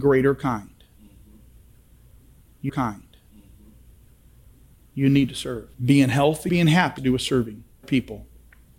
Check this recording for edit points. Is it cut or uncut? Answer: cut